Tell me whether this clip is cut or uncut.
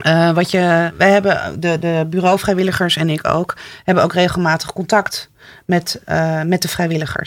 uncut